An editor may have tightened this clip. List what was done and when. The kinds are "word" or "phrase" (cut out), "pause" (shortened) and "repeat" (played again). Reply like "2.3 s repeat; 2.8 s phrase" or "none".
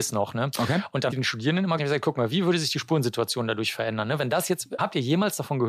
1.1 s phrase; 1.8 s word; 4.8 s word

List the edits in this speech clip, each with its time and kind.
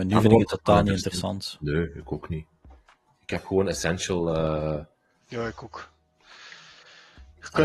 none

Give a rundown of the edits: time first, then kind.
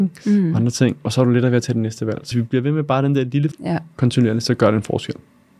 2.3 s word; 3.5 s word

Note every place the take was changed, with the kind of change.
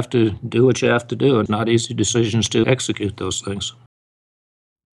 1.5 s word; 2.6 s word

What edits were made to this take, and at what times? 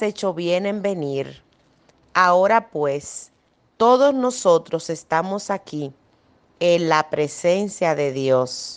none

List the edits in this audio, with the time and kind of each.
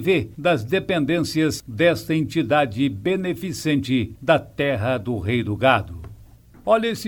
none

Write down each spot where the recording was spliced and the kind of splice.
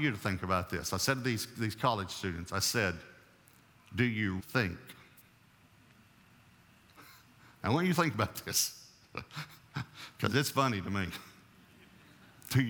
4.4 s word

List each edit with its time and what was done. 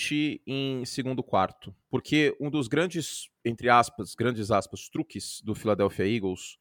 1.8 s pause

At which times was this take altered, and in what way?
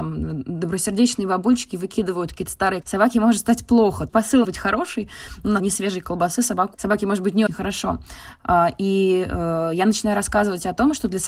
2.8 s word; 4.1 s phrase; 4.4 s word; 5.6 s phrase; 6.7 s word; 7.5 s word

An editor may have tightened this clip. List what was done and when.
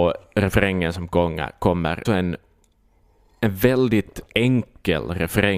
2.1 s phrase

